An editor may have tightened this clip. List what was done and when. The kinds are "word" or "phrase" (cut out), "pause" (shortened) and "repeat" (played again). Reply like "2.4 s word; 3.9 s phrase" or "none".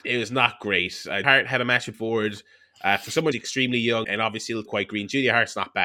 1.2 s word; 1.9 s word; 3.3 s word; 4.0 s word; 4.7 s word

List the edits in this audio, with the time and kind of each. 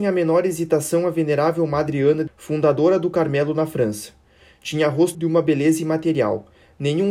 2.3 s word; 5.1 s word

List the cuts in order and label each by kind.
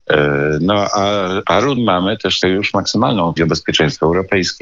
1.4 s word; 1.8 s word; 2.4 s word; 3.4 s word

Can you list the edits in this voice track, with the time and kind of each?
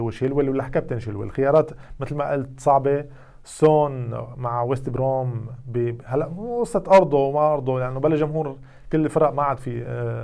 none

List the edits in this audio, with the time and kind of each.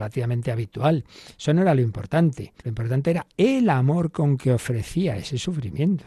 2.6 s pause

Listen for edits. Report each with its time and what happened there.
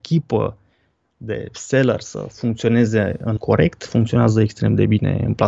3.4 s word

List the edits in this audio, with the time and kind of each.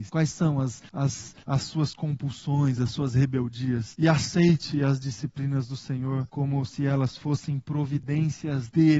none

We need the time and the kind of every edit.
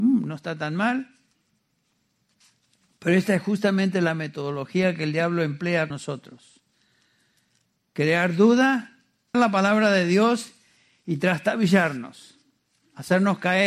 5.9 s word; 9.3 s word

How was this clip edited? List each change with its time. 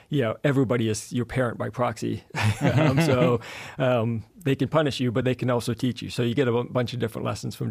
none

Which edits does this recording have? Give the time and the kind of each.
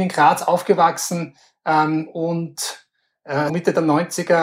3.5 s word

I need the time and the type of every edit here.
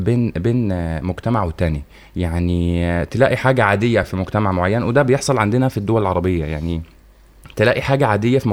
none

